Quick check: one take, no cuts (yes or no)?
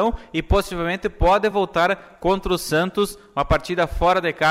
yes